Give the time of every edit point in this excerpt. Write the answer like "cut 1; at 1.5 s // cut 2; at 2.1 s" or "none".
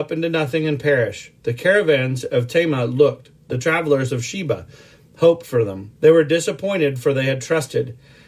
cut 1; at 6.0 s

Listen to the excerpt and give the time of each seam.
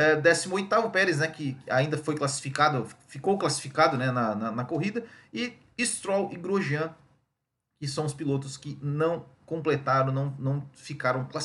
none

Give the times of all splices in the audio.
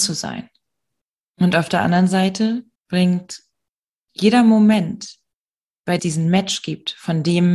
cut 1; at 2.7 s // cut 2; at 6.0 s

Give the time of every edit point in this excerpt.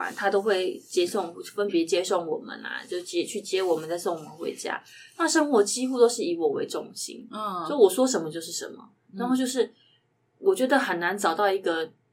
none

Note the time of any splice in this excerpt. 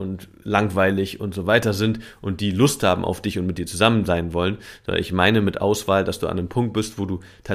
none

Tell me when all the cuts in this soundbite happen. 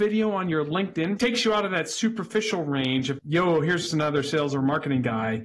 cut 1; at 1.2 s // cut 2; at 3.2 s // cut 3; at 3.9 s

